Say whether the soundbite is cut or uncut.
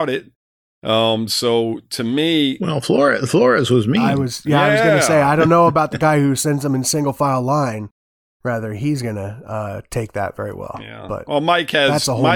uncut